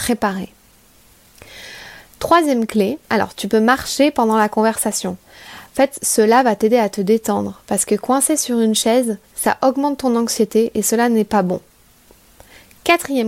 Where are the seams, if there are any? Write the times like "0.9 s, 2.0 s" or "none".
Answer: 3.0 s, 9.3 s